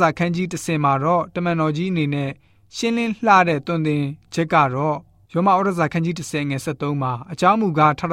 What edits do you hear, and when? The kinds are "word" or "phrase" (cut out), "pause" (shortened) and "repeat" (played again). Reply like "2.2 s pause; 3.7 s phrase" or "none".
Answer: none